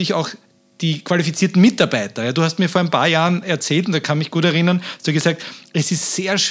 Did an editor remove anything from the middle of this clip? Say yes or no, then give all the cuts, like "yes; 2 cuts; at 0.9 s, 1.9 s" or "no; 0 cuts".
no; 0 cuts